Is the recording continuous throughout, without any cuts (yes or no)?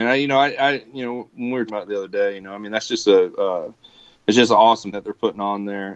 no